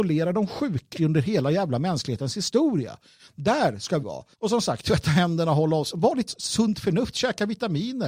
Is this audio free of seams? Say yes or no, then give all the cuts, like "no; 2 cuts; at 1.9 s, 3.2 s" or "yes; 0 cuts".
no; 4 cuts; at 0.9 s, 4.0 s, 4.3 s, 6.3 s